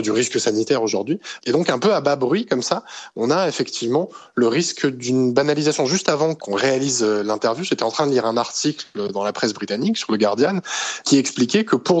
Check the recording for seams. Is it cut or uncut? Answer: uncut